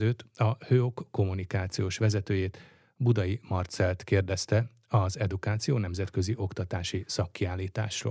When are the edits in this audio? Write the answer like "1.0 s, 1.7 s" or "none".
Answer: none